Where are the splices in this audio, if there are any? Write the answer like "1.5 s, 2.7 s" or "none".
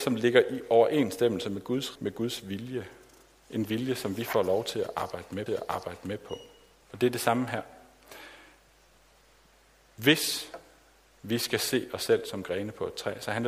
2.0 s, 5.5 s